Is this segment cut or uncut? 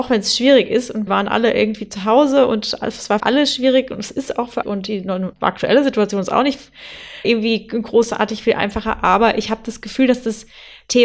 cut